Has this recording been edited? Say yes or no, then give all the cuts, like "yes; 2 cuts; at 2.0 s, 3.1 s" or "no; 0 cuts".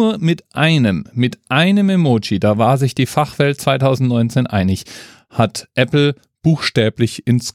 no; 0 cuts